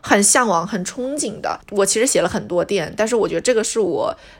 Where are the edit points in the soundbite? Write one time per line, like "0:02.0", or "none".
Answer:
none